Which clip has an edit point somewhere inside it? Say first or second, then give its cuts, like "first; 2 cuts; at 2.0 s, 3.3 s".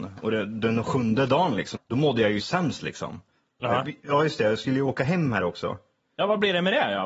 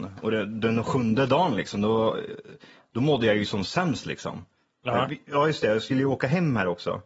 first; 2 cuts; at 1.7 s, 2.4 s